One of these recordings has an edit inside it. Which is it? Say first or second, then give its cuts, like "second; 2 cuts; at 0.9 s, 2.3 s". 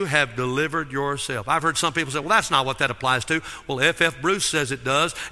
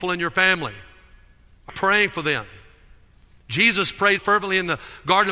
second; 2 cuts; at 1.7 s, 4.2 s